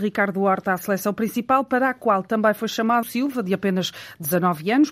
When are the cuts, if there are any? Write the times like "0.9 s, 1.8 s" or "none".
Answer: 3.0 s